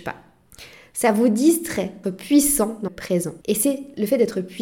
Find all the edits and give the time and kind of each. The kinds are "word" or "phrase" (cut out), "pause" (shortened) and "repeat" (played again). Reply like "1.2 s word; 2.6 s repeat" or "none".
2.0 s word; 2.9 s word; 3.4 s pause